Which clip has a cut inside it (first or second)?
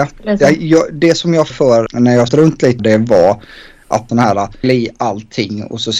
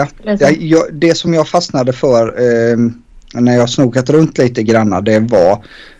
first